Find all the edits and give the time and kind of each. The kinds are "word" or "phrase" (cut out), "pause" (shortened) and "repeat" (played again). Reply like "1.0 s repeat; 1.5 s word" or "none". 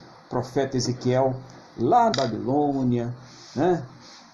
2.1 s word